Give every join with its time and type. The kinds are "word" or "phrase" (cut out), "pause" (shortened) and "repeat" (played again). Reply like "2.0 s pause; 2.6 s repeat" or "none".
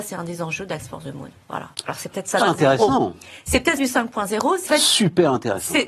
1.7 s pause; 2.4 s word; 3.8 s word; 4.7 s word